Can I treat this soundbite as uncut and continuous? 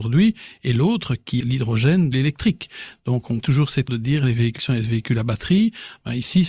no; 5 cuts; at 1.4 s, 2.1 s, 3.4 s, 3.9 s, 4.6 s

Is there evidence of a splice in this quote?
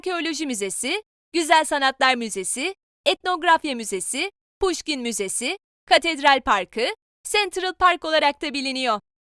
no; 0 cuts

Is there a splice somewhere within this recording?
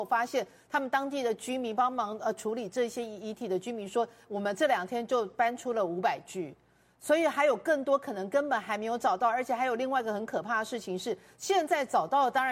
no; 0 cuts

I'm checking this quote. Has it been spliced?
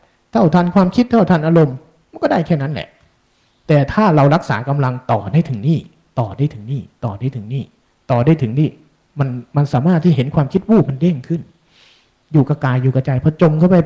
no; 0 cuts

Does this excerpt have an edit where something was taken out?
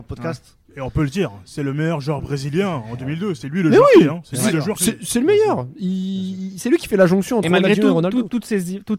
no; 0 cuts

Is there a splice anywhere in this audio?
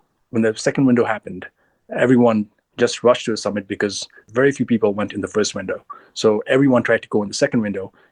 no; 0 cuts

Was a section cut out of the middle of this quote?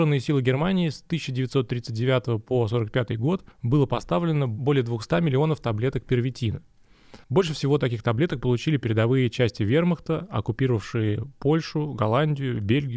yes; 2 cuts; at 3.5 s, 7.2 s

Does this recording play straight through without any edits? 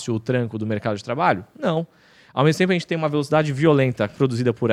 yes; 0 cuts

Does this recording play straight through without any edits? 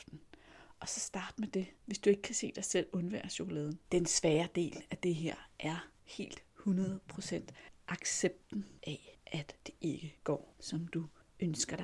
no; 2 cuts; at 1.7 s, 3.8 s

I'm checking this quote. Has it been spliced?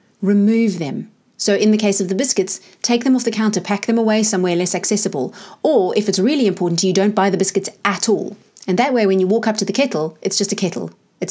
no; 0 cuts

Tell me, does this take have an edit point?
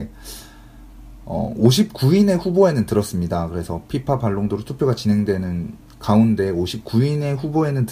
no; 0 cuts

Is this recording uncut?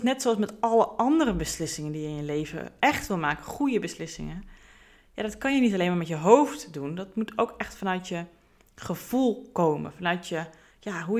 yes; 0 cuts

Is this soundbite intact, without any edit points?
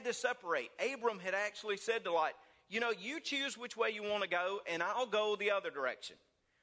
yes; 0 cuts

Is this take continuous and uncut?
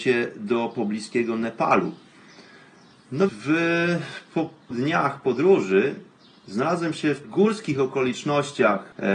no; 3 cuts; at 3.3 s, 4.7 s, 7.2 s

